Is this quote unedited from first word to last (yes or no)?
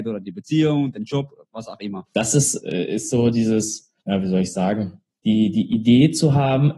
no